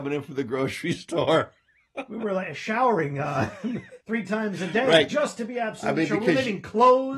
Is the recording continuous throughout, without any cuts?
no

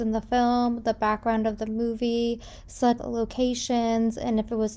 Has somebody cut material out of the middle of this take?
yes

